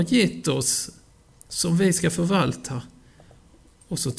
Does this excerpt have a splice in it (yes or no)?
no